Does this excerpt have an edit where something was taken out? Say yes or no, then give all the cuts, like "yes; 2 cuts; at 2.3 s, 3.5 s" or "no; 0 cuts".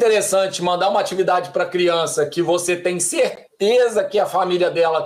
no; 0 cuts